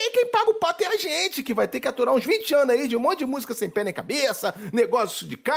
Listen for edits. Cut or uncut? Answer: uncut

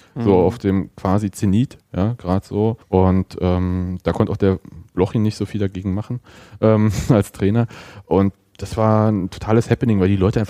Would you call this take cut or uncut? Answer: cut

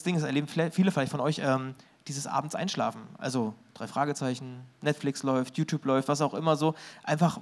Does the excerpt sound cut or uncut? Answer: uncut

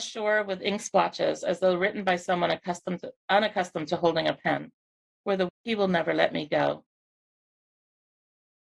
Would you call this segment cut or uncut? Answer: cut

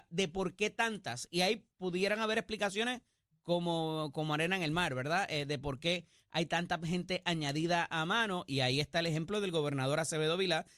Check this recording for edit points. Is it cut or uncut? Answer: uncut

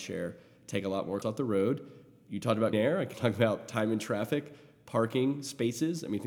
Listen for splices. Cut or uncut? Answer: cut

